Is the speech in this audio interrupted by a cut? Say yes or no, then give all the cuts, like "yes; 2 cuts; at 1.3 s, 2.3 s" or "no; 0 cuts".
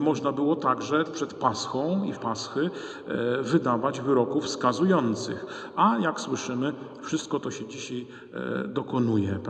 yes; 2 cuts; at 1.1 s, 2.2 s